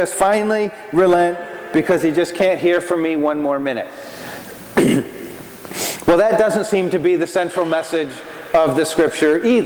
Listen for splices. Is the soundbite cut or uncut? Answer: uncut